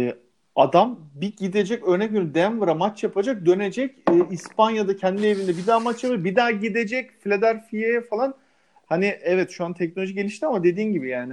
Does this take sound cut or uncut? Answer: uncut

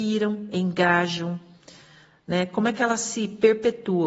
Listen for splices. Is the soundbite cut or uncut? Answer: uncut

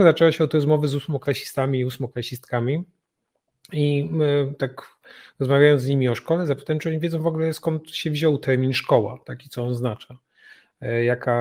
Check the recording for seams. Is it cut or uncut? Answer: uncut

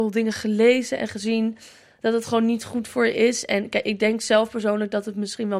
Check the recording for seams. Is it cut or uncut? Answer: uncut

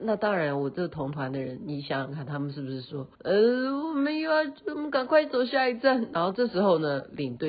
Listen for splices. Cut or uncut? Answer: cut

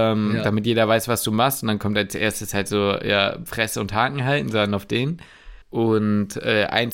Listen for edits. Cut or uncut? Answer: cut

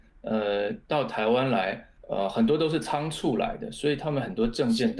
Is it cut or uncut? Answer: cut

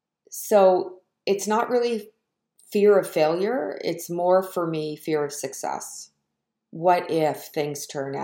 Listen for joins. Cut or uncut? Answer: uncut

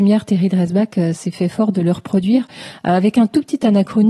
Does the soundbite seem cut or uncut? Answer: uncut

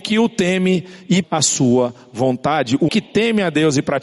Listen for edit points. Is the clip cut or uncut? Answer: cut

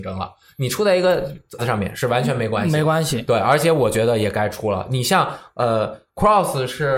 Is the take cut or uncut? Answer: cut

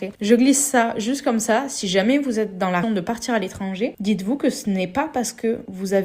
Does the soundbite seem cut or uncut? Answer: cut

